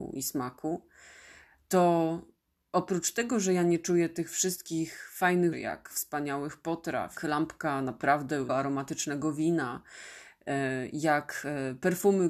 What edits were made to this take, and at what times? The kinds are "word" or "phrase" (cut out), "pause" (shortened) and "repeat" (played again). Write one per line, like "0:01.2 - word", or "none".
0:05.5 - word
0:05.9 - word
0:07.2 - word
0:08.5 - word